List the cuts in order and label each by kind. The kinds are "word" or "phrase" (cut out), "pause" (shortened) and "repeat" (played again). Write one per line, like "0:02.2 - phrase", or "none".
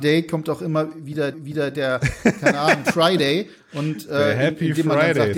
0:01.3 - repeat
0:02.8 - phrase